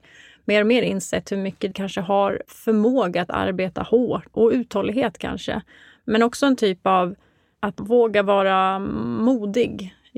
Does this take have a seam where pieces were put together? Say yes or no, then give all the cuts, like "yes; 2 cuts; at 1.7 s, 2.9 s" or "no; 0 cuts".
yes; 3 cuts; at 1.7 s, 2.5 s, 4.3 s